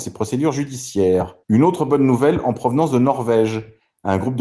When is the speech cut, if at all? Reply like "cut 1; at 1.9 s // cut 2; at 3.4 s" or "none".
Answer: cut 1; at 1.4 s